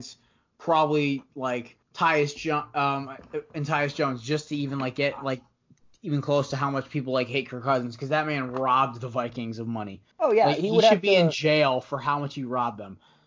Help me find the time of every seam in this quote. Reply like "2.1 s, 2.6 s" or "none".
1.8 s, 10.1 s